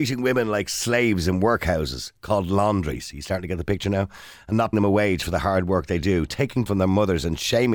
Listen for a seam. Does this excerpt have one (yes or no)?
yes